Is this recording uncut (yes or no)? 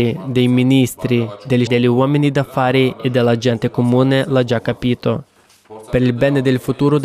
no